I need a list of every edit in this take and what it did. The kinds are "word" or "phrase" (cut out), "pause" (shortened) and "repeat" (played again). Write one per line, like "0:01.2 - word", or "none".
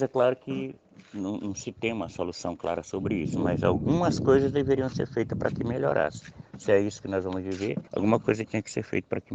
0:07.9 - pause